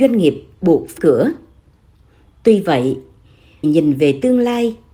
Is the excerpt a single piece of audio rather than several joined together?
no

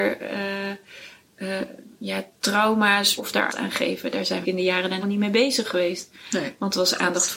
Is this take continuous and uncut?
no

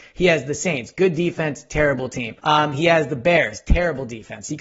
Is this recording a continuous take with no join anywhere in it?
no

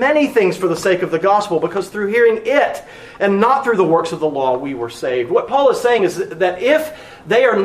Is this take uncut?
yes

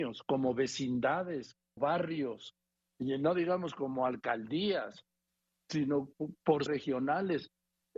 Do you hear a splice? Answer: yes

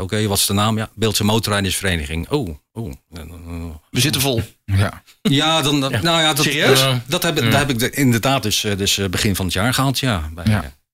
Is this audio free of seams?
yes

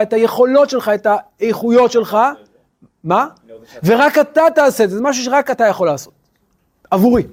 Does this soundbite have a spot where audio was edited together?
no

